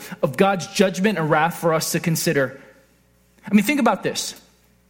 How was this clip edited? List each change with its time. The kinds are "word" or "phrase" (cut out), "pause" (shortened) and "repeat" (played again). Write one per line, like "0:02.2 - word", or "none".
none

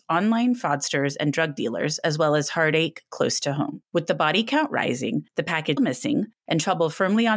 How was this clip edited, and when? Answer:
0:03.9 - pause
0:05.3 - pause
0:05.8 - word

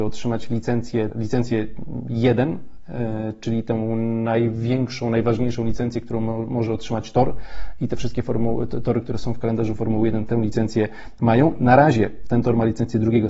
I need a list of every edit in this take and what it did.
0:01.1 - word

